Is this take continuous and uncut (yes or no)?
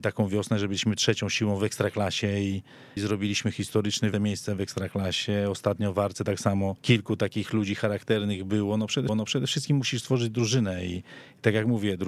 no